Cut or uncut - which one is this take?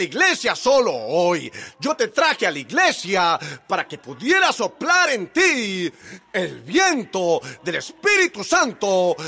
uncut